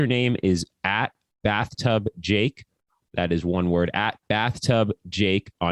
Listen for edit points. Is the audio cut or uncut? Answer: uncut